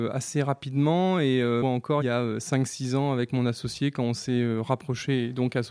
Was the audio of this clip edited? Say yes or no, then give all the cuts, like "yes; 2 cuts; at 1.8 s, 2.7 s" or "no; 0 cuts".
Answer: yes; 1 cut; at 1.6 s